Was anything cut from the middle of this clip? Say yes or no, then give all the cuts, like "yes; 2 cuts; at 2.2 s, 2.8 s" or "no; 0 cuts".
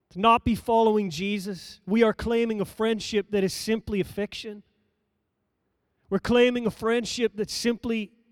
no; 0 cuts